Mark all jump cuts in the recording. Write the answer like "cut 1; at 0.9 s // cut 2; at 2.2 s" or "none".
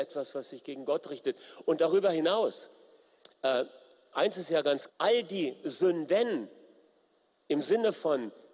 cut 1; at 4.9 s

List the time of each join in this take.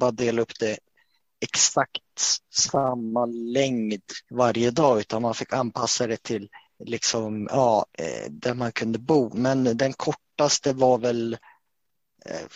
cut 1; at 4.2 s // cut 2; at 6.7 s // cut 3; at 7.9 s

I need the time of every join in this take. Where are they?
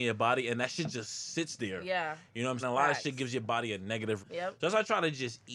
cut 1; at 2.6 s // cut 2; at 4.2 s

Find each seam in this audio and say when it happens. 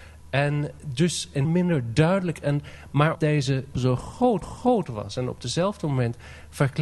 cut 1; at 1.4 s // cut 2; at 3.1 s // cut 3; at 3.7 s // cut 4; at 4.4 s

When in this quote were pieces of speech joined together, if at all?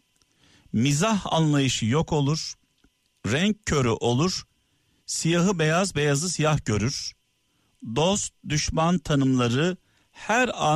none

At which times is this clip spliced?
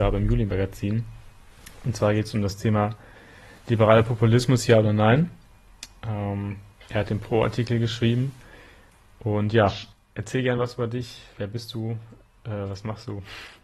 none

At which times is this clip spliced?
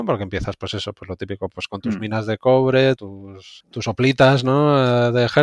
cut 1; at 3.0 s // cut 2; at 3.6 s

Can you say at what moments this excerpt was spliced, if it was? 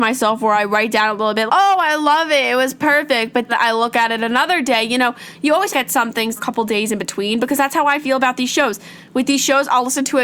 cut 1; at 1.5 s // cut 2; at 3.5 s // cut 3; at 5.7 s // cut 4; at 6.4 s

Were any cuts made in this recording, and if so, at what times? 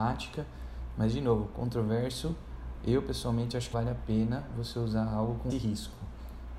cut 1; at 3.7 s // cut 2; at 5.5 s

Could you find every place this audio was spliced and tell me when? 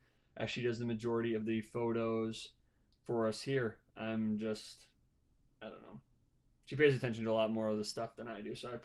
cut 1; at 2.9 s

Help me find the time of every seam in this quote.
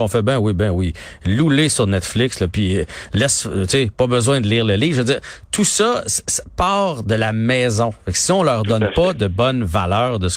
none

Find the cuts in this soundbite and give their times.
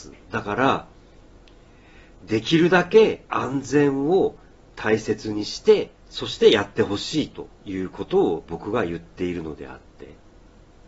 cut 1; at 3.3 s // cut 2; at 6.0 s // cut 3; at 7.6 s

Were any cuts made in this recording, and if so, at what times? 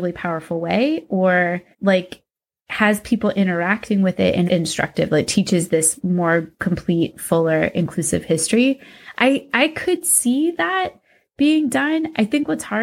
cut 1; at 1.7 s // cut 2; at 4.5 s // cut 3; at 6.5 s

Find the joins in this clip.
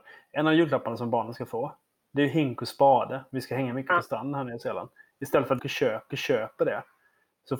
cut 1; at 5.6 s // cut 2; at 6.1 s

